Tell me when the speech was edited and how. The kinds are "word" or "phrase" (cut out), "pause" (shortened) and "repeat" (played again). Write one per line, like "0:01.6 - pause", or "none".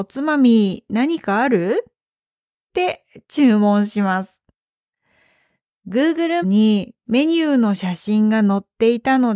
0:06.4 - word